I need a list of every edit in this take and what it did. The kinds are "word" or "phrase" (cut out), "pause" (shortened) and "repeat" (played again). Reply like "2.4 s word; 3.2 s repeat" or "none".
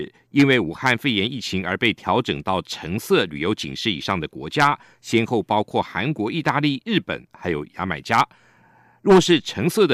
none